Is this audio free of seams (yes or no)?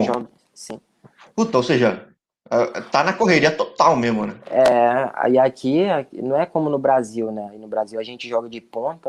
yes